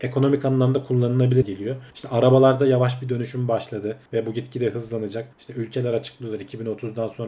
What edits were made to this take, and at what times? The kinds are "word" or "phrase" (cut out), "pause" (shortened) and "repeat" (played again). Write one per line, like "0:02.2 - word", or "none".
0:01.4 - word
0:01.9 - pause
0:04.1 - pause
0:05.3 - pause

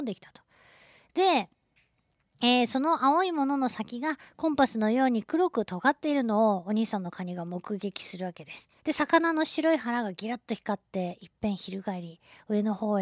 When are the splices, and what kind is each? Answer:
0:08.8 - pause

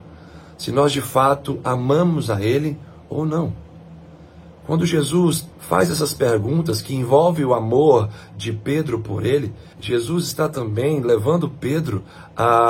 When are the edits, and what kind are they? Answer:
0:05.5 - pause
0:09.7 - pause

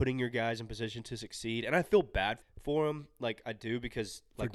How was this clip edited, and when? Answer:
0:02.4 - word

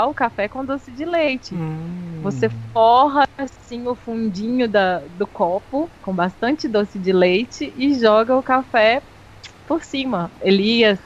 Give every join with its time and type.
0:06.0 - pause

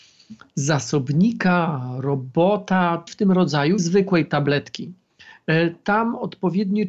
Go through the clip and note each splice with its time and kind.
0:03.1 - word
0:03.8 - word

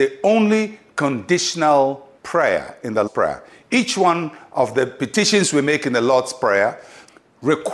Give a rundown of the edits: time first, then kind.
0:02.2 - pause
0:03.1 - word

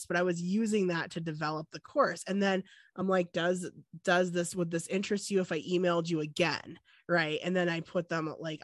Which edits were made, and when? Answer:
none

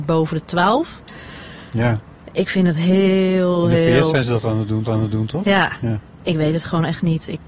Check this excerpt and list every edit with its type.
0:04.8 - repeat

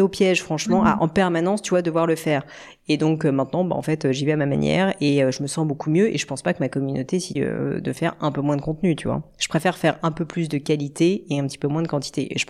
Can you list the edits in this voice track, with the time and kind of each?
0:07.4 - phrase

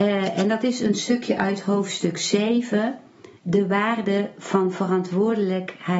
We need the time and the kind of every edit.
0:03.4 - pause

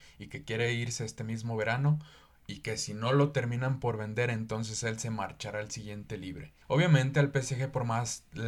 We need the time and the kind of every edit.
0:06.6 - pause

